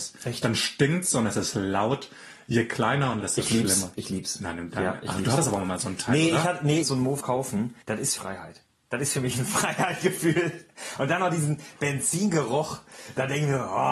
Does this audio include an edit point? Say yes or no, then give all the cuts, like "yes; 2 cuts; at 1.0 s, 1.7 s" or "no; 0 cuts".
yes; 5 cuts; at 3.2 s, 6.8 s, 7.2 s, 7.8 s, 8.2 s